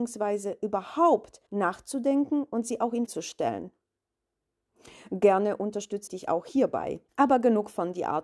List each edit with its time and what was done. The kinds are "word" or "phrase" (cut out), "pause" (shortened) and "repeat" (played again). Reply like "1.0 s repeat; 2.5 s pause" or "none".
1.5 s pause; 3.1 s word; 6.1 s word; 7.1 s pause